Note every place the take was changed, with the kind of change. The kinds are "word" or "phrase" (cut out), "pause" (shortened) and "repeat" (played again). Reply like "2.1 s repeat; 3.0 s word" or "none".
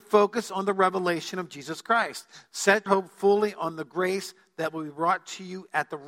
2.9 s word